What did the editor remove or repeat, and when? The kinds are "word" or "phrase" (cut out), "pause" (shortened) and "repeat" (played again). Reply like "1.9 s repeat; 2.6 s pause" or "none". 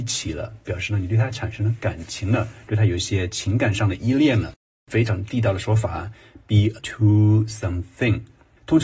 6.8 s word